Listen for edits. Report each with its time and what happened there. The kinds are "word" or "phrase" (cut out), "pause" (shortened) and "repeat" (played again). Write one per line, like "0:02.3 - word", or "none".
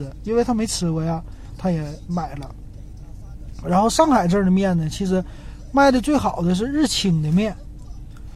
0:01.6 - phrase